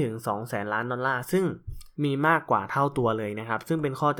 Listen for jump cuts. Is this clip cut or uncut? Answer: cut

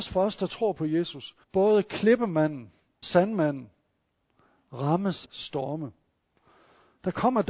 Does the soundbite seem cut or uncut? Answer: cut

